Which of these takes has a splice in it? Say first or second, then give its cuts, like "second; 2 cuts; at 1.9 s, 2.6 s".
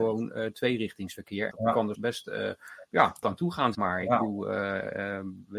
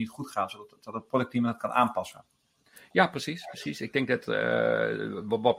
first; 4 cuts; at 1.5 s, 1.9 s, 3.2 s, 3.7 s